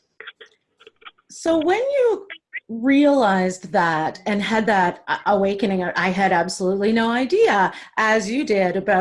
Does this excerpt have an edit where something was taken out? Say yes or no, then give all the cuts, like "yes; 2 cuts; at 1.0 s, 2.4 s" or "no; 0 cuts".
yes; 1 cut; at 2.6 s